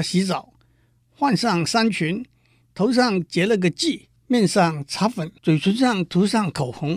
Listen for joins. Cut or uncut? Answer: cut